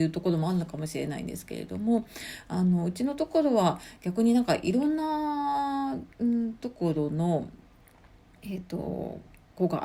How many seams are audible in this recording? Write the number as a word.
one